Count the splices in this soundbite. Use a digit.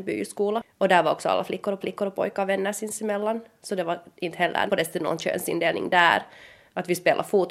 2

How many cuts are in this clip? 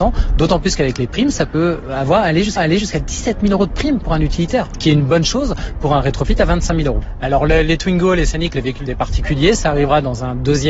1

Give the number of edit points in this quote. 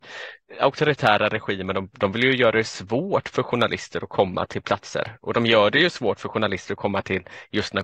0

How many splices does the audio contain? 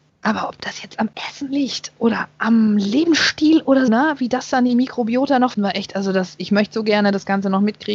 2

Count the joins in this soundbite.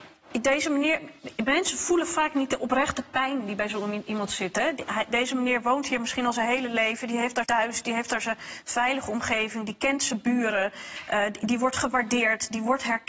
1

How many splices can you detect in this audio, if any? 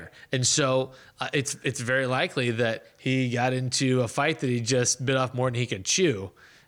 0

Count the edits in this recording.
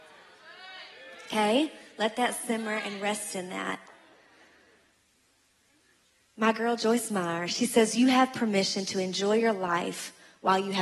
0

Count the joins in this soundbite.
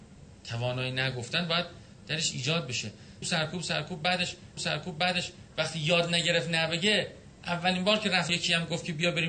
3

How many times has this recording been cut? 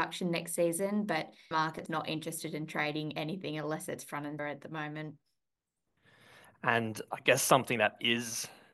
3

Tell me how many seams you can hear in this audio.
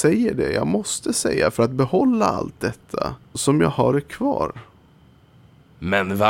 1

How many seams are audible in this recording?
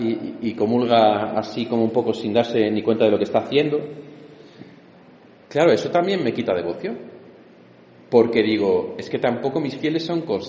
0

